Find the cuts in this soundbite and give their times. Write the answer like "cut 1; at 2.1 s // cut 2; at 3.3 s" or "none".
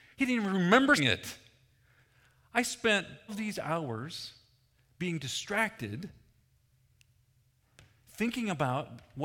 cut 1; at 1.0 s // cut 2; at 3.3 s